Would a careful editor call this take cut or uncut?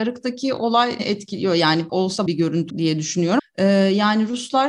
cut